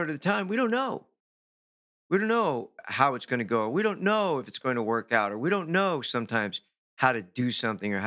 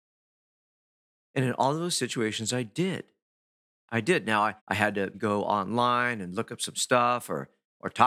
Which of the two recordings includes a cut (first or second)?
second